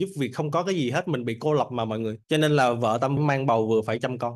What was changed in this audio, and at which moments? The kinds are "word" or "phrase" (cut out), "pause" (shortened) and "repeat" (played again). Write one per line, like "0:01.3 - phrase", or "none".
0:02.2 - pause
0:03.2 - phrase